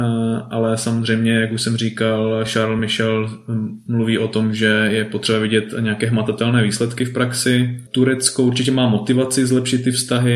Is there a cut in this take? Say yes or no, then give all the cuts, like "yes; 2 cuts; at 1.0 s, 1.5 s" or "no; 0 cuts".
no; 0 cuts